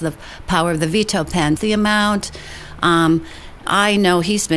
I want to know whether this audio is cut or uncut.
cut